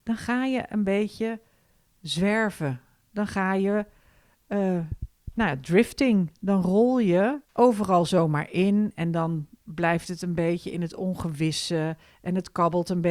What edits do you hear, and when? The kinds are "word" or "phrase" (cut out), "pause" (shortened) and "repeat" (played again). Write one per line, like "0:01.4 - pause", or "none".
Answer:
0:07.4 - pause